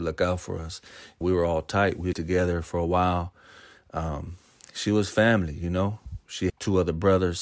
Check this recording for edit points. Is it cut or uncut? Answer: cut